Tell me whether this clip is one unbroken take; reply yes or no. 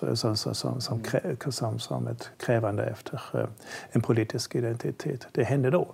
no